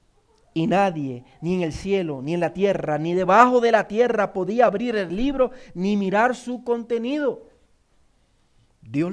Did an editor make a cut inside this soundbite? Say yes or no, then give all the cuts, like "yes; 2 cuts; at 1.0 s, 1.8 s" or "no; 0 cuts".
no; 0 cuts